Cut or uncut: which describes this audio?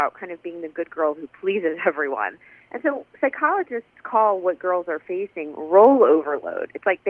uncut